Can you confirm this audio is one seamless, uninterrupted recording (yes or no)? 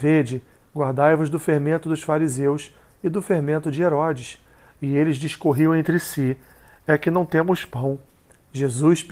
yes